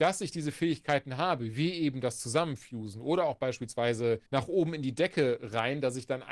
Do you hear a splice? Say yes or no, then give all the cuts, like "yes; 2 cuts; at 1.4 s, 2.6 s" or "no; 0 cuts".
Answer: yes; 1 cut; at 4.3 s